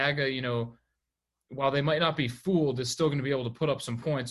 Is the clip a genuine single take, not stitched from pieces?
yes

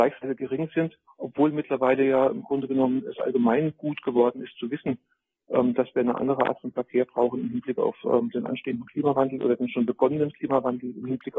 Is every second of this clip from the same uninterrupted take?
yes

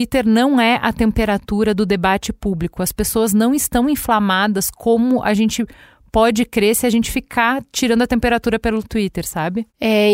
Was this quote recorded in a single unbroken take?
yes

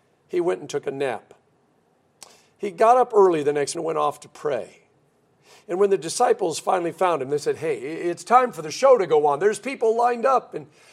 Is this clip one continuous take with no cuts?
no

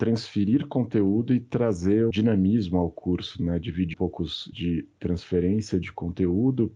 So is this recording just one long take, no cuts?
no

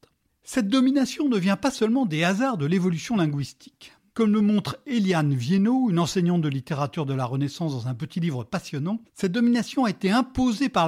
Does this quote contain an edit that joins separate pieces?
no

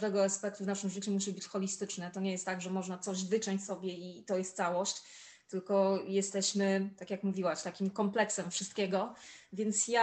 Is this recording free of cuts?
yes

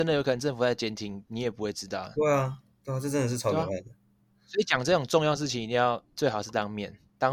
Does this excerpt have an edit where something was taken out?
no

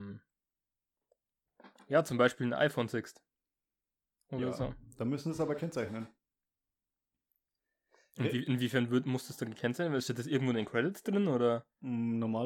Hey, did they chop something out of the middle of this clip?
no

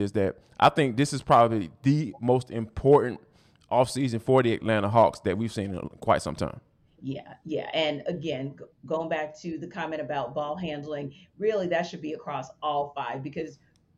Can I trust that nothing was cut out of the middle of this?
yes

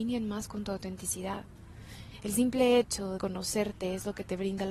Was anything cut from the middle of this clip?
yes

